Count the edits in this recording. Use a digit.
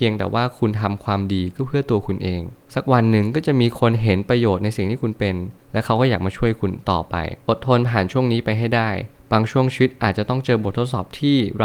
1